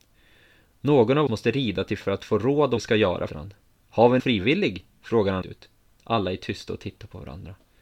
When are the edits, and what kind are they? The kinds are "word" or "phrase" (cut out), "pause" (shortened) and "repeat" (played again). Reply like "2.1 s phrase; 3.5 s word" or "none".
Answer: 1.3 s word; 2.0 s word; 2.8 s word; 3.3 s word; 4.2 s word; 5.4 s word